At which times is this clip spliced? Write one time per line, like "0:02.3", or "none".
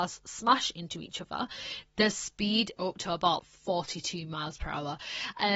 0:02.8
0:03.4

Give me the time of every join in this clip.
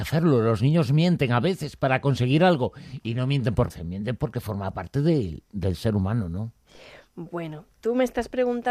0:03.7

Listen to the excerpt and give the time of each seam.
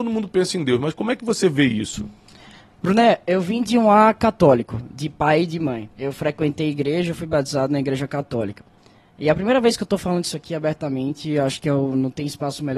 0:05.9

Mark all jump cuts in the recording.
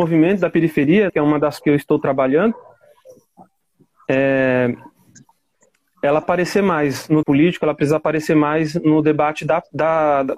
0:01.1
0:01.6
0:06.2
0:07.2

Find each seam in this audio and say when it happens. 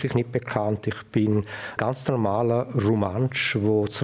0:01.8

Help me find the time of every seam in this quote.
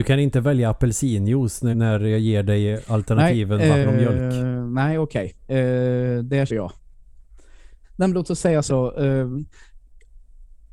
0:01.7
0:03.8
0:06.5
0:07.8
0:08.7

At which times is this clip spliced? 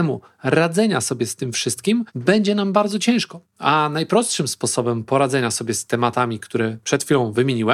0:02.1

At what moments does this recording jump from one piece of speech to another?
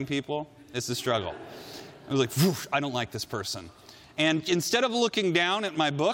none

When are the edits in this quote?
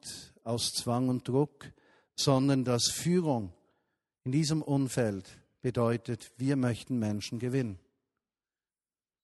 none

